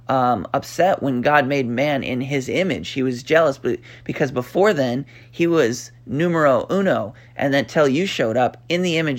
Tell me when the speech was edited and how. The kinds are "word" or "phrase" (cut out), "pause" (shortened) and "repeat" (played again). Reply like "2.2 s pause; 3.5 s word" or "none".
none